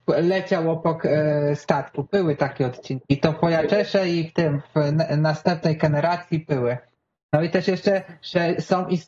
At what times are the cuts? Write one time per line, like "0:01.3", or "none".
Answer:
none